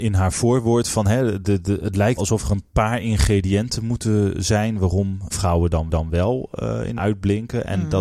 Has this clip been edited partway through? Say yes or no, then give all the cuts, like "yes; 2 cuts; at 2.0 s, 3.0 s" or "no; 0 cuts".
yes; 5 cuts; at 1.4 s, 2.2 s, 5.3 s, 5.9 s, 7.0 s